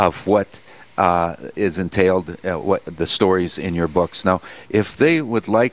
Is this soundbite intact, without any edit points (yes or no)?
yes